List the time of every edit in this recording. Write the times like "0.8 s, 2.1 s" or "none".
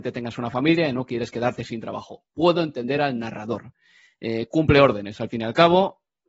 none